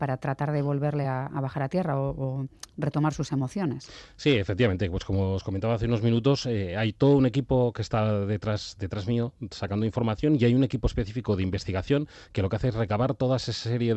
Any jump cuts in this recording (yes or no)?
no